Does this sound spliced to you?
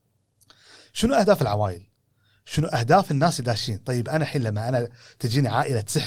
no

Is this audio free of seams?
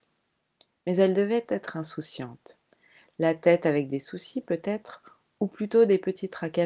yes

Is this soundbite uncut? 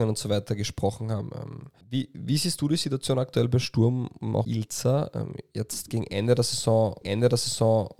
no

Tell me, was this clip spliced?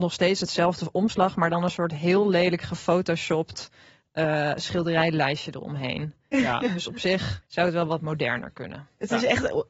yes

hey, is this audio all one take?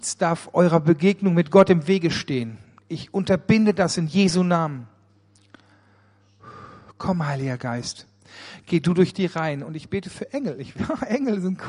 yes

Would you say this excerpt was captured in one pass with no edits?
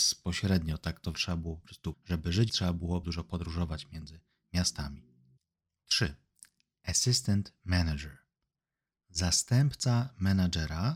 no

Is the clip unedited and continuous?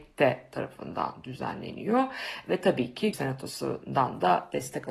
no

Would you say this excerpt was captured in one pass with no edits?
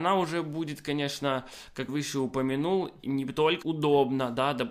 no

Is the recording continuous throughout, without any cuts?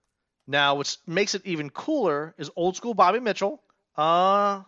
yes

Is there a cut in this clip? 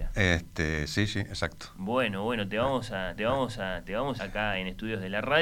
yes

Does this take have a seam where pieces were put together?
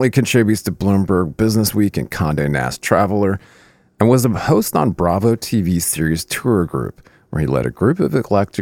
no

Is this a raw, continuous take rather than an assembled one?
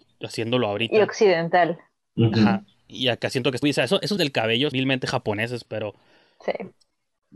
no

